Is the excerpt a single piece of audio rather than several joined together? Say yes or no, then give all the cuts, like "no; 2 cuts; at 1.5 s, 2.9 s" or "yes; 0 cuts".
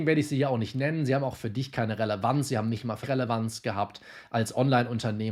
no; 1 cut; at 3.0 s